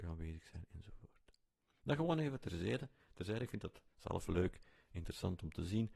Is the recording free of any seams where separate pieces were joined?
yes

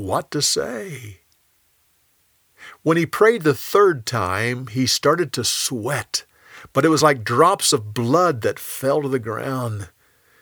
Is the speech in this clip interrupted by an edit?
no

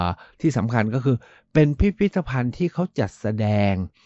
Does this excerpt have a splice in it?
no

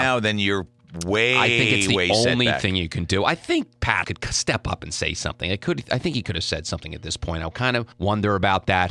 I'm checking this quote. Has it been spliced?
yes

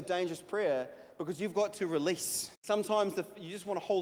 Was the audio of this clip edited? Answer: yes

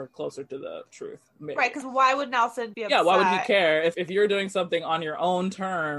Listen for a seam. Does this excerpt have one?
yes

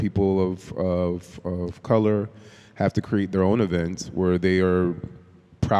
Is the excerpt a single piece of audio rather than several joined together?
yes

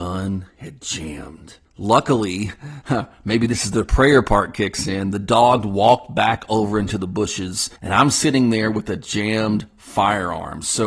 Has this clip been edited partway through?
yes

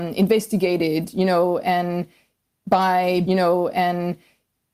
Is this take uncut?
no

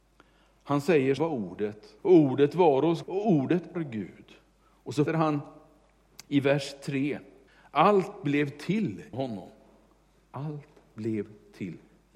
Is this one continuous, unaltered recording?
no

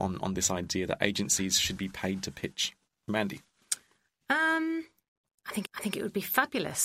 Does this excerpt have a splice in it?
yes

